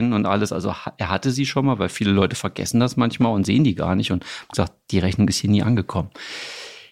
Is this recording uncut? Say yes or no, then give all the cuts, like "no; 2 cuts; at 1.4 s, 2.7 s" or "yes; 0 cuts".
yes; 0 cuts